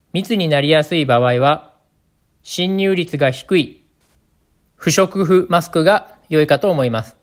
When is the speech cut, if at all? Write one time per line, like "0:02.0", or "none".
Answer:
none